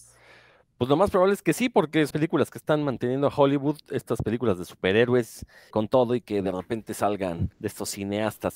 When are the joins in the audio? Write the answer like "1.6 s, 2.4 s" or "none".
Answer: 2.1 s, 5.7 s, 7.5 s